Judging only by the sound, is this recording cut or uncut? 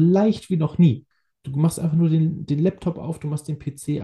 uncut